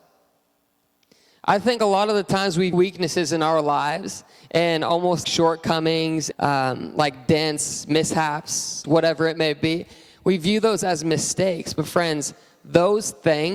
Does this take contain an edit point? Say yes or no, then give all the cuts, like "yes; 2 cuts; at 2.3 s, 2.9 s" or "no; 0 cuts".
yes; 4 cuts; at 2.7 s, 5.2 s, 6.3 s, 8.8 s